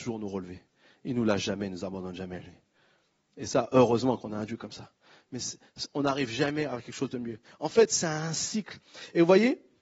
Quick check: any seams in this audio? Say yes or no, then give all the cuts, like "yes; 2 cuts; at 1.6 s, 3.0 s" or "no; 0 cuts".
no; 0 cuts